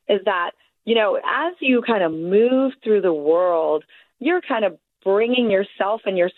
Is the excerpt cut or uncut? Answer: uncut